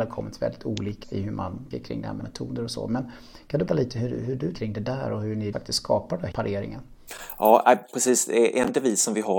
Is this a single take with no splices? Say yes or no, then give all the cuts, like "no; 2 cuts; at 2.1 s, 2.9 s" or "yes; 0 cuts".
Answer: no; 7 cuts; at 1.0 s, 1.7 s, 2.2 s, 3.7 s, 4.5 s, 5.5 s, 6.3 s